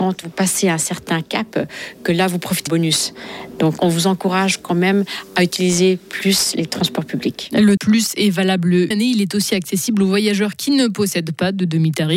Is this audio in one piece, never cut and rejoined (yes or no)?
no